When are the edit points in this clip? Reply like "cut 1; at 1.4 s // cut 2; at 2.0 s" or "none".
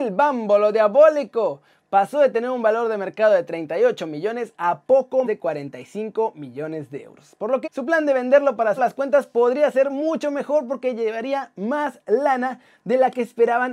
cut 1; at 5.2 s // cut 2; at 7.6 s // cut 3; at 8.8 s